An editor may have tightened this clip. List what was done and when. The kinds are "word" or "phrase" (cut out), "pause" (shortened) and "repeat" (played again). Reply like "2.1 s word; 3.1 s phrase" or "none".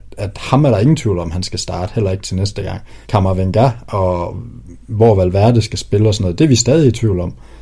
3.0 s pause